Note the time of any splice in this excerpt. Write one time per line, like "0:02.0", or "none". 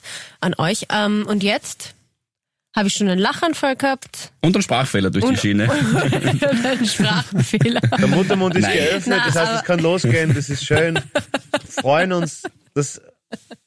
0:11.6